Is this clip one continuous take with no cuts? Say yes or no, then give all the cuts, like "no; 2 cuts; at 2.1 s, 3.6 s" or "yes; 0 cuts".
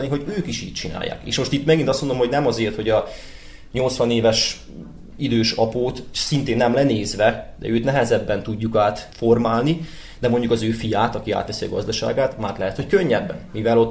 yes; 0 cuts